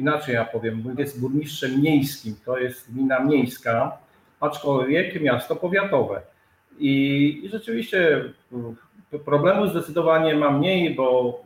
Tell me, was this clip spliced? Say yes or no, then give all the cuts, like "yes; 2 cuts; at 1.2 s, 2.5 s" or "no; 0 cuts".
yes; 1 cut; at 1.0 s